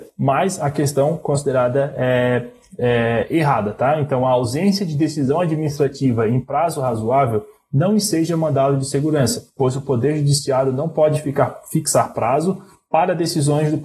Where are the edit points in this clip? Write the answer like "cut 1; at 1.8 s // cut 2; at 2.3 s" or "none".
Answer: none